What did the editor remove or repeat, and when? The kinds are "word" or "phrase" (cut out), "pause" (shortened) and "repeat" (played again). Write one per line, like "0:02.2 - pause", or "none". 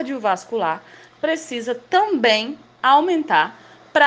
none